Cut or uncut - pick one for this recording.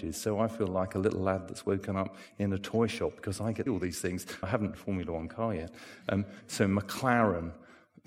cut